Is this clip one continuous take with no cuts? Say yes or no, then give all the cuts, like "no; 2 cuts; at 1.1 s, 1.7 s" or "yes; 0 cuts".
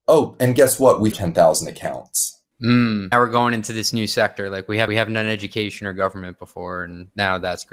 no; 3 cuts; at 1.1 s, 3.1 s, 4.9 s